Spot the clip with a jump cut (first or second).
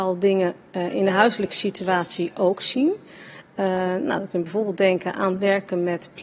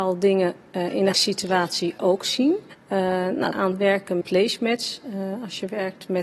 second